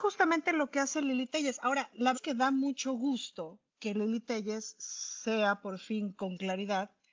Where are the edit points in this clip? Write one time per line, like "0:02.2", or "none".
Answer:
0:02.1
0:03.7